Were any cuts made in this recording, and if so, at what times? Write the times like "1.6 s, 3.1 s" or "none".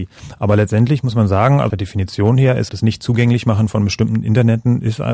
1.7 s, 2.7 s